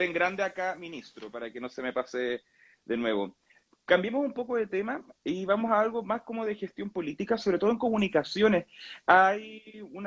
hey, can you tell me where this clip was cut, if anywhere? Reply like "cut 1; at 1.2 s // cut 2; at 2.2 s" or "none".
none